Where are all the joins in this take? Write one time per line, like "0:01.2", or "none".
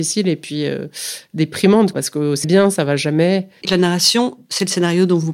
0:01.9
0:02.4
0:03.6